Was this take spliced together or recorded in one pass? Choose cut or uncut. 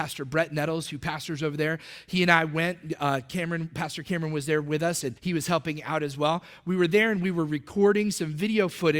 cut